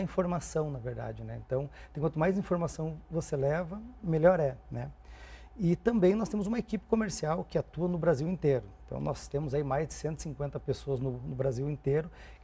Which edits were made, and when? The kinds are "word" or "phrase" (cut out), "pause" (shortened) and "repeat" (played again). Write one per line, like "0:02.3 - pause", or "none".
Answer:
none